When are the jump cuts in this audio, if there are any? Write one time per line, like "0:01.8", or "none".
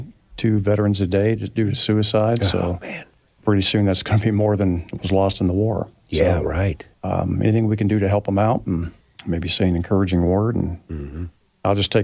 0:03.4
0:06.9
0:09.0